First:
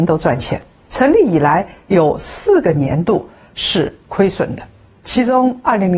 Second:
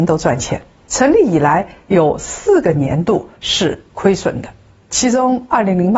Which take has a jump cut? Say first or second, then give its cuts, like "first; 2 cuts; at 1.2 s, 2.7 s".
second; 1 cut; at 3.4 s